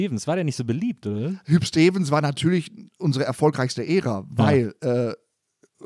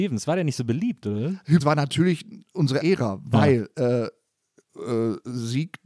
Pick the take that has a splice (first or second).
second